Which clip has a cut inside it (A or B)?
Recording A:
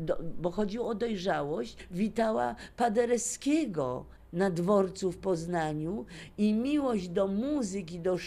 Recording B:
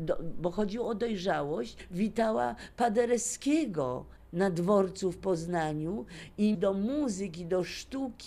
B